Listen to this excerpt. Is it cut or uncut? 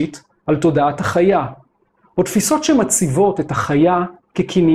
uncut